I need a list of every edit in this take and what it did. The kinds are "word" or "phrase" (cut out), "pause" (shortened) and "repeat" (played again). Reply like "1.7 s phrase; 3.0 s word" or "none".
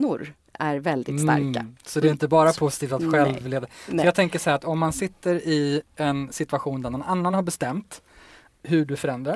none